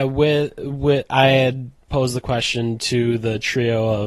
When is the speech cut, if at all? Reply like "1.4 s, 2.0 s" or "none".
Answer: none